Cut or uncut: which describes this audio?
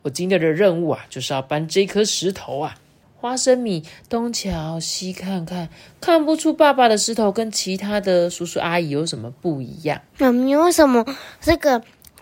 cut